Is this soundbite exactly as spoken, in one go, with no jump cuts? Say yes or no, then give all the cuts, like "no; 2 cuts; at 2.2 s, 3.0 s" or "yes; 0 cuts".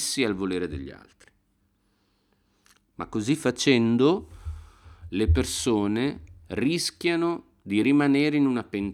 yes; 0 cuts